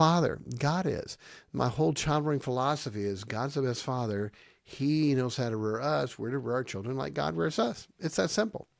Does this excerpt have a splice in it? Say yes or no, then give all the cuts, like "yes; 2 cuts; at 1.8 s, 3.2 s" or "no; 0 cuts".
no; 0 cuts